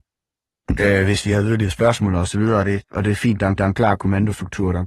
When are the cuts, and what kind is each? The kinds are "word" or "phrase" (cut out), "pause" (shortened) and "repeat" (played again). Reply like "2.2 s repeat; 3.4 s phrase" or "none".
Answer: 3.6 s repeat